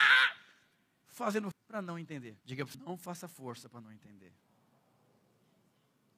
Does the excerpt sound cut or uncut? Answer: cut